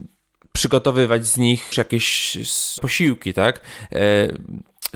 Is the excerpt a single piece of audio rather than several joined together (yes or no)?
no